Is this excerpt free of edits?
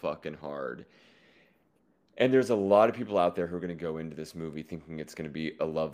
yes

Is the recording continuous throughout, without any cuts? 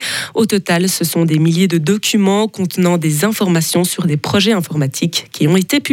yes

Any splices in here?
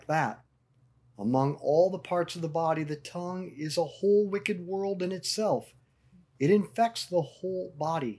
no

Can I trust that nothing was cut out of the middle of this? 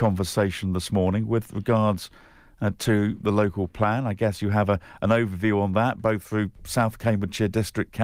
yes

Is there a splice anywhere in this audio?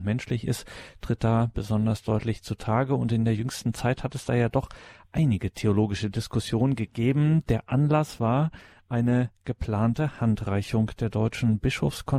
no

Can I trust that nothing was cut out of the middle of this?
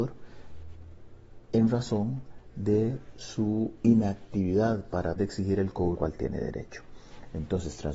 no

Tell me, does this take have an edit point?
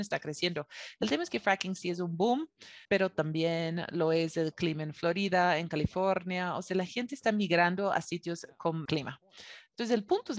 yes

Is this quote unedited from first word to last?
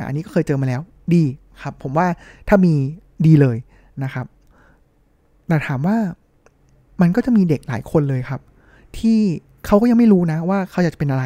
yes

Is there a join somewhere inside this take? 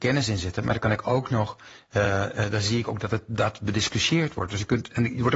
no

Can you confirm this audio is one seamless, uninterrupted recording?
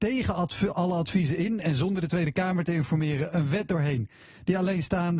yes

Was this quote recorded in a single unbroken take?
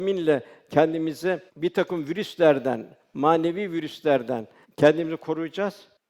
no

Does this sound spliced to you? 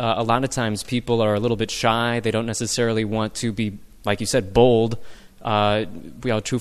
no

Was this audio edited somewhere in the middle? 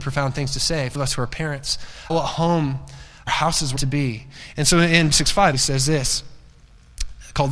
yes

